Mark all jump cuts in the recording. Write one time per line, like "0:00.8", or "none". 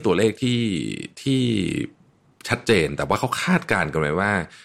none

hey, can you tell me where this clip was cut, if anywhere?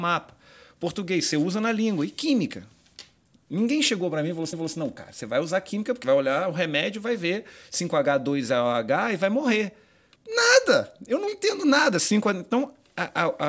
0:04.5
0:06.0
0:10.2

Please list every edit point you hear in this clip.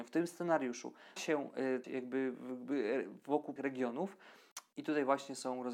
0:01.2
0:01.8
0:03.6

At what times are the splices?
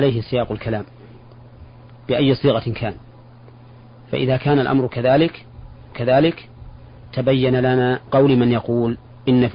0:05.9
0:08.1

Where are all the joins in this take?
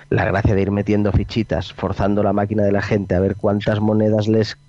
none

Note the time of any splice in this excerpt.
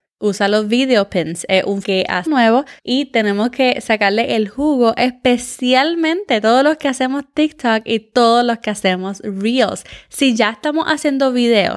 0:01.8
0:02.3
0:02.8

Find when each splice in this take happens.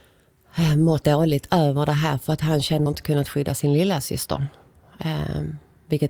0:01.0
0:02.9

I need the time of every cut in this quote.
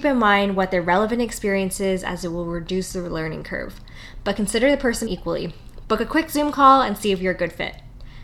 0:05.1

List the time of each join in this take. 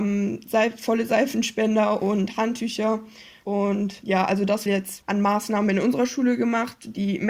0:04.7

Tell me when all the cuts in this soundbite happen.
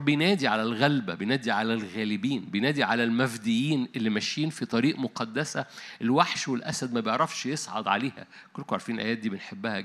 none

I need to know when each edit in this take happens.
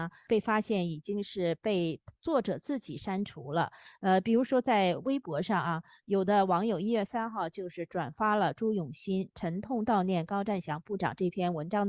none

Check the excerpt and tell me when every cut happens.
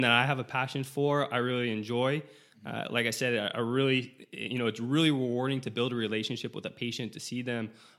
none

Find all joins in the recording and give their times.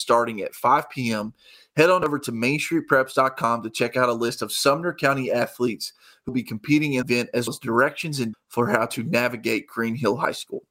0:06.3
0:07.0
0:07.5
0:08.3

